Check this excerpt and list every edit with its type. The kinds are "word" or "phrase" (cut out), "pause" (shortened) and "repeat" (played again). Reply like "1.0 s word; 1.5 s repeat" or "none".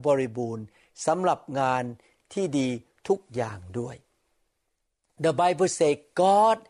none